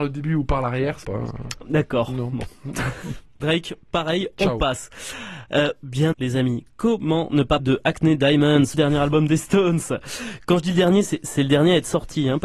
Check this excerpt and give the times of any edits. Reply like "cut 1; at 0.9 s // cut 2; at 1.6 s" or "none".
cut 1; at 1.0 s // cut 2; at 3.4 s // cut 3; at 6.1 s // cut 4; at 7.6 s // cut 5; at 8.7 s